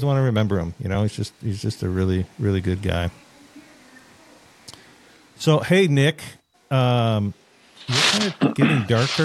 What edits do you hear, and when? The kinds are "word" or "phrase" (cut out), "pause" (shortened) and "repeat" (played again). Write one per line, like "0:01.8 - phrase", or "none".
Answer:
none